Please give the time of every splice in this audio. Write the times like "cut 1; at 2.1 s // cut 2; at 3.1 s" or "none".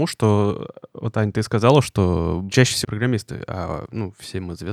cut 1; at 2.8 s

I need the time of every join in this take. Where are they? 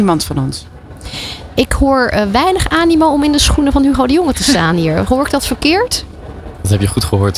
none

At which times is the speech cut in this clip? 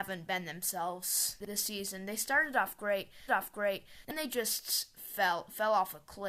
cut 1; at 3.3 s

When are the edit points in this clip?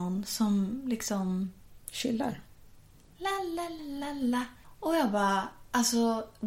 cut 1; at 3.8 s // cut 2; at 4.6 s

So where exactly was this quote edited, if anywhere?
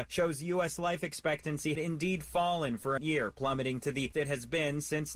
cut 1; at 1.8 s // cut 2; at 3.0 s // cut 3; at 4.1 s

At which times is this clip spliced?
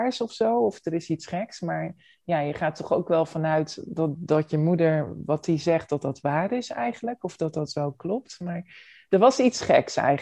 none

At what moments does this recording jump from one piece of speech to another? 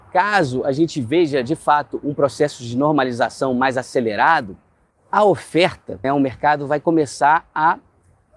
cut 1; at 4.9 s // cut 2; at 6.0 s

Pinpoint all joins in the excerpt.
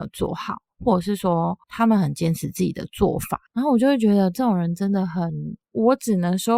cut 1; at 1.6 s // cut 2; at 3.5 s

